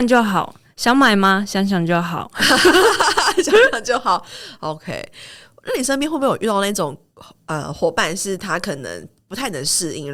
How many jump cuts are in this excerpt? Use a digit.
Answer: 0